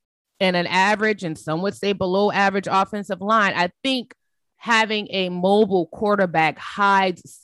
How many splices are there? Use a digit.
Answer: 0